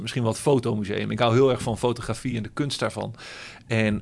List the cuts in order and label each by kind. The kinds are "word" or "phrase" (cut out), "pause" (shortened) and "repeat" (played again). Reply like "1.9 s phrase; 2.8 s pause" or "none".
none